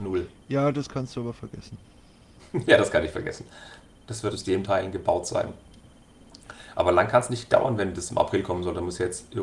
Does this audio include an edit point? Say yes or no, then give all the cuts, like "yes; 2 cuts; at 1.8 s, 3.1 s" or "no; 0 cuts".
yes; 1 cut; at 4.3 s